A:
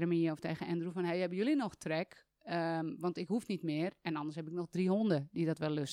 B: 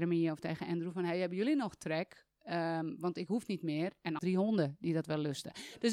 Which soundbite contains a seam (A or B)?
B